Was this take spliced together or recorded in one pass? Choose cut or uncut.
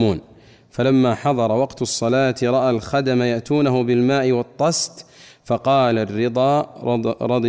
uncut